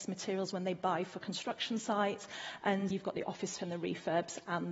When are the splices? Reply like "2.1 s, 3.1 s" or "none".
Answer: 2.9 s, 3.6 s

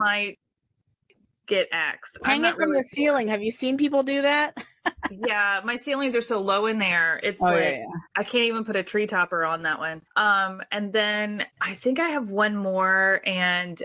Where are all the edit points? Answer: 4.8 s, 8.1 s, 10.1 s, 11.5 s

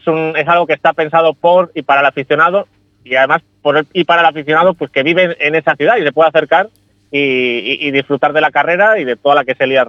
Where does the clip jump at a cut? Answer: none

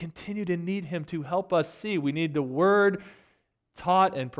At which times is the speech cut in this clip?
none

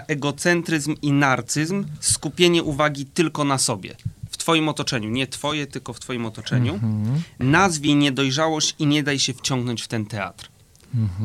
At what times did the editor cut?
none

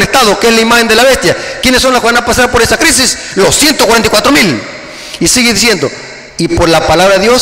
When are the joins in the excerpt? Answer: 6.3 s

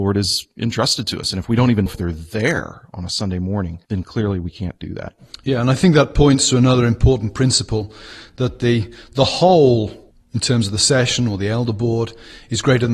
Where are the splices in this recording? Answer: 1.9 s, 3.8 s, 10.1 s

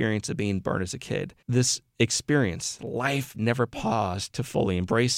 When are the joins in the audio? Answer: 1.4 s, 2.8 s, 3.3 s

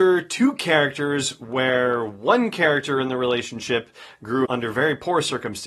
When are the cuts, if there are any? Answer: 4.5 s

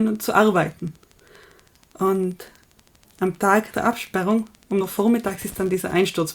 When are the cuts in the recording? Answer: 3.1 s, 3.7 s, 4.8 s

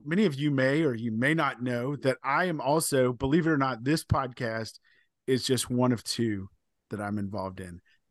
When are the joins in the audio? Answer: none

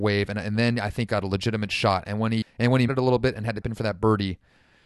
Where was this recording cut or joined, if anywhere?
1.1 s, 2.4 s, 2.9 s, 3.6 s

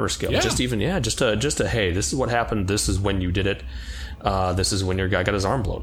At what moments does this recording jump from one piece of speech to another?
none

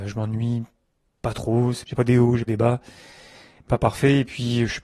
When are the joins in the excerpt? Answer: 2.0 s, 2.5 s, 3.7 s

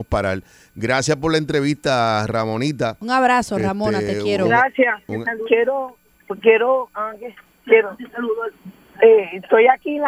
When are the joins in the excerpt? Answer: none

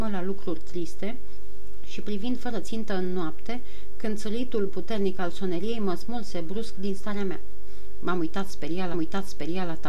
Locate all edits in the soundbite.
8.9 s

